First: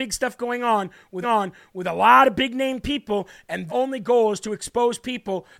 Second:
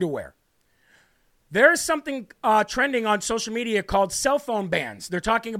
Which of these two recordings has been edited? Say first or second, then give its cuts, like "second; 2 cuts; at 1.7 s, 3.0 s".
first; 2 cuts; at 1.2 s, 3.7 s